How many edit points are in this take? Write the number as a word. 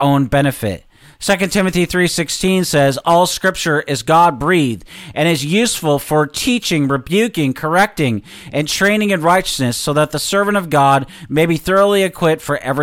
zero